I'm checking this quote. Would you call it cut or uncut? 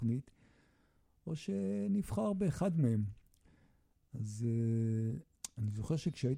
uncut